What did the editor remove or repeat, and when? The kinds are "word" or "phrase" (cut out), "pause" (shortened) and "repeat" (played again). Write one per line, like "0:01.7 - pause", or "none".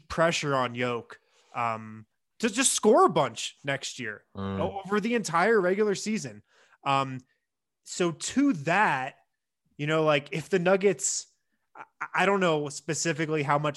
none